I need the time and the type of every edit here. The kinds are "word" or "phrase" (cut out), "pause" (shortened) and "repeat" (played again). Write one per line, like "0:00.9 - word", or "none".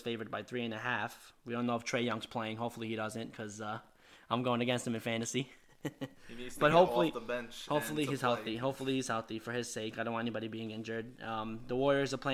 none